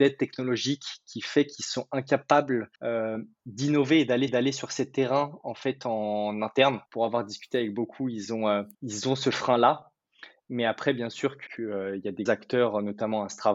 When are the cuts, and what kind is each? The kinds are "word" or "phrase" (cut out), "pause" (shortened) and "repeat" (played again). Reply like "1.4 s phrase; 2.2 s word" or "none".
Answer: 2.8 s pause; 4.3 s repeat; 6.9 s pause; 8.7 s pause; 11.5 s word; 12.3 s word